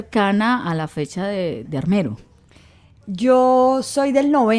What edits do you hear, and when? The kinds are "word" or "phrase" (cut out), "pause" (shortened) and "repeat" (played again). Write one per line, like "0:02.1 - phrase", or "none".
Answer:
0:01.6 - word